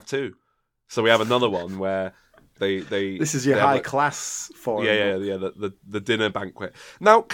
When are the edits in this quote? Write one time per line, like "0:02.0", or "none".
none